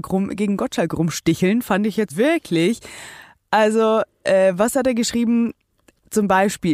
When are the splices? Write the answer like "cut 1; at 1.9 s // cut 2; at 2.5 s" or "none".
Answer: cut 1; at 2.1 s